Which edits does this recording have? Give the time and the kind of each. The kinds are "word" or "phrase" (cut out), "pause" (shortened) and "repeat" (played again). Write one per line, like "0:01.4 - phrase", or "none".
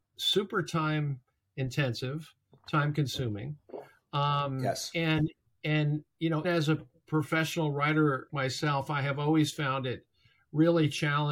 0:06.4 - word
0:08.3 - word